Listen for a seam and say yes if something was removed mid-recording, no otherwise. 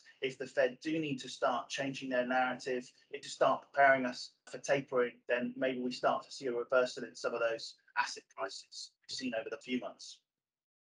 yes